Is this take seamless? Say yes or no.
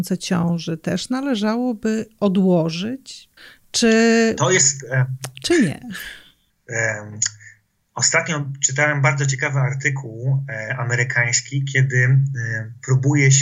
no